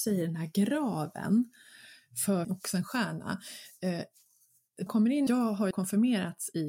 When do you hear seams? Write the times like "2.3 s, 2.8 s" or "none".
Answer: 2.4 s, 4.9 s, 5.3 s, 5.7 s